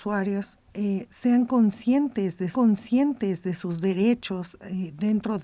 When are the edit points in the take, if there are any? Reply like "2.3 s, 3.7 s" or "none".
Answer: 2.5 s